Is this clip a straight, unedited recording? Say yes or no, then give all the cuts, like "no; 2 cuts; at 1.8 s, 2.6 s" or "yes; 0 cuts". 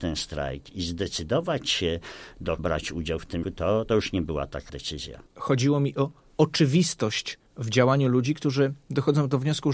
no; 5 cuts; at 2.6 s, 3.4 s, 3.9 s, 4.7 s, 5.3 s